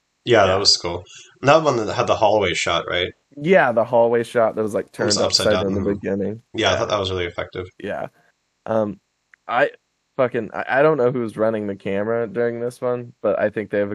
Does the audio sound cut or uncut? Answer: cut